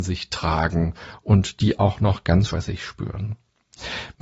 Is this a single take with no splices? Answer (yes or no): no